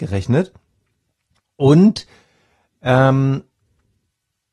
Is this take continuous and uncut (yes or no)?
yes